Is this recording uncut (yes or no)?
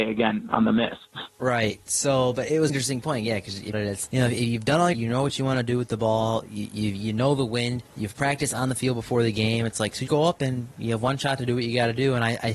no